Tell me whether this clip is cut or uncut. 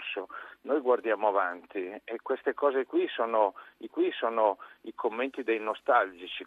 cut